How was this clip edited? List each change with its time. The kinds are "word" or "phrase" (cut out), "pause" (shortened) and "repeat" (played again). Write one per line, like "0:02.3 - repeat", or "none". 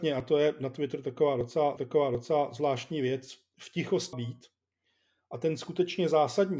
0:01.8 - repeat
0:04.1 - word